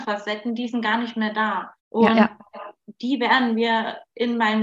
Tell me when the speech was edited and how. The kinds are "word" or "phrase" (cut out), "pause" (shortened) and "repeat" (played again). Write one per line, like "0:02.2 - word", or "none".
0:01.8 - pause